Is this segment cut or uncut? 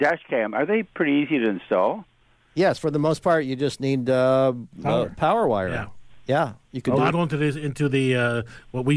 cut